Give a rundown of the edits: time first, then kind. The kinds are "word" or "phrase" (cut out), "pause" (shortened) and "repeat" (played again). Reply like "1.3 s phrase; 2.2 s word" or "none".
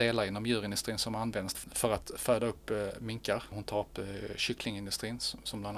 1.5 s word